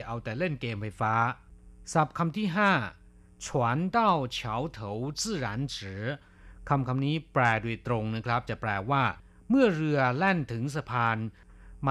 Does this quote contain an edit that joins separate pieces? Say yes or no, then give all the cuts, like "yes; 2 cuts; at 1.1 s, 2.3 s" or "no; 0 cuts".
no; 0 cuts